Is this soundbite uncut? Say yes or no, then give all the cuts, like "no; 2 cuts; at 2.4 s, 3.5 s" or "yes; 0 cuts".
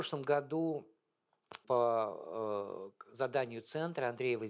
no; 1 cut; at 1.6 s